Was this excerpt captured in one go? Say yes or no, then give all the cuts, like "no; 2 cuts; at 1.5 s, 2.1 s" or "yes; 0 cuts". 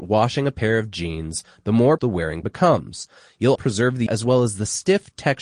no; 4 cuts; at 2.0 s, 2.4 s, 3.6 s, 4.1 s